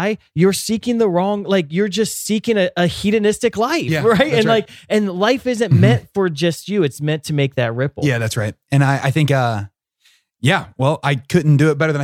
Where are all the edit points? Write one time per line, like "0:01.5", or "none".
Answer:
none